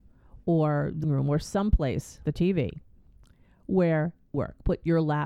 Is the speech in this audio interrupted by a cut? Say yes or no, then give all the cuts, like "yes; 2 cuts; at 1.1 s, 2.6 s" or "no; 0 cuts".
yes; 3 cuts; at 1.0 s, 2.2 s, 4.3 s